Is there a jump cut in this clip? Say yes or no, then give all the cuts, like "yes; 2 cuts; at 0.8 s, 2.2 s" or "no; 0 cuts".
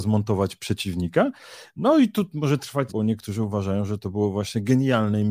yes; 1 cut; at 2.9 s